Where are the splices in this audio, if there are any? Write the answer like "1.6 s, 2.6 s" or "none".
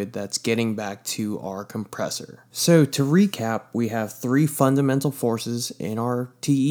2.5 s